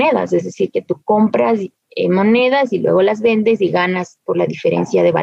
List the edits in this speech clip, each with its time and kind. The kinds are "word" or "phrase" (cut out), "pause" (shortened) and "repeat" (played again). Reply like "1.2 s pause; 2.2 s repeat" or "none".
none